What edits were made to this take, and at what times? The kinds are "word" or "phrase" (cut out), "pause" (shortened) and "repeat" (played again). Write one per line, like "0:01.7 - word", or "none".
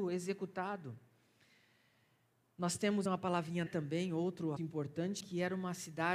0:03.1 - word
0:03.7 - word
0:04.6 - word
0:05.2 - word

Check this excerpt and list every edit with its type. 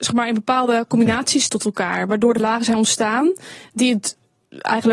0:01.5 - word
0:02.4 - word

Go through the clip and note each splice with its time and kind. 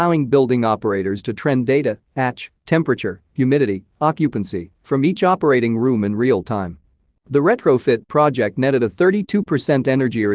none

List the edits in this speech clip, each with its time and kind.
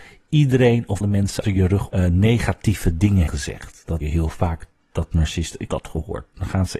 0:01.0 - word
0:01.4 - word
0:01.9 - word
0:03.3 - word
0:04.0 - word
0:05.7 - word

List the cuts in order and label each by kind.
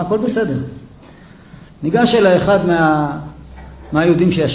0:01.7 - pause

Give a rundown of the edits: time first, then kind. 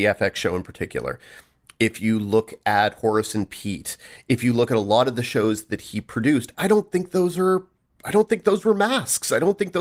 0:06.5 - word

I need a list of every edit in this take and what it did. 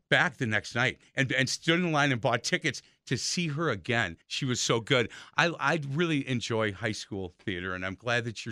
0:01.1 - pause
0:04.2 - pause

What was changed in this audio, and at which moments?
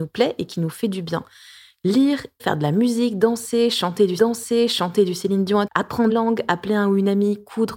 0:02.4 - word
0:04.2 - repeat
0:05.7 - word
0:06.1 - word

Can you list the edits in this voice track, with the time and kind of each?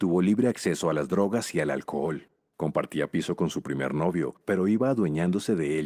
none

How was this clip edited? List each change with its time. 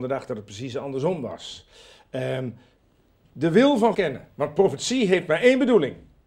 0:03.2 - word
0:03.9 - phrase

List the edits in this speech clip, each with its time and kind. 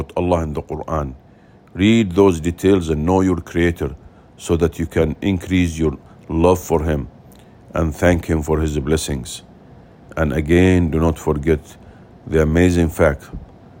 none

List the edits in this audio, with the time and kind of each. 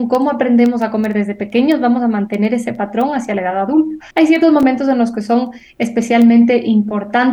0:04.1 - pause

